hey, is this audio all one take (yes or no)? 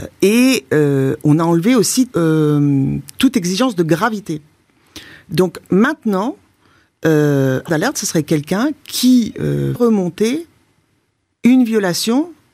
no